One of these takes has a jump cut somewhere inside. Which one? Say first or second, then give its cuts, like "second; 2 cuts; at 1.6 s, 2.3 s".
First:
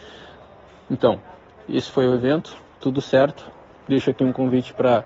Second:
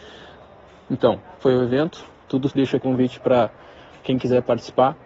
second; 3 cuts; at 1.4 s, 2.5 s, 2.8 s